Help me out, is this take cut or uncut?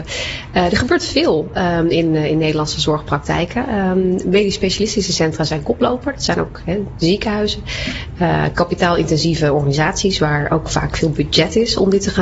uncut